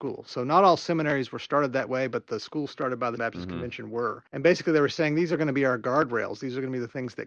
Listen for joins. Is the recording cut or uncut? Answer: cut